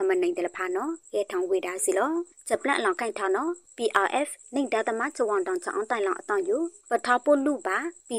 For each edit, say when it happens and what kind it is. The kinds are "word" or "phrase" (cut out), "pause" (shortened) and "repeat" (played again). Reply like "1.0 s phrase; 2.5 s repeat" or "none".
none